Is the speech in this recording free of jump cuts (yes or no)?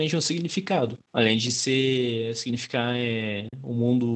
no